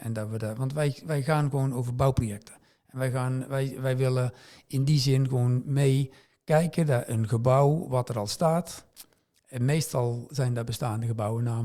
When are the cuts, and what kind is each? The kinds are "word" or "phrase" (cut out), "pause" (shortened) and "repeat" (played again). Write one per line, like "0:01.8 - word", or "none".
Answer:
none